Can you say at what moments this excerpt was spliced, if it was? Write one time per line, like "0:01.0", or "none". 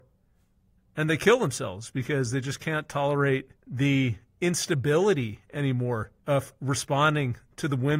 0:03.6
0:06.2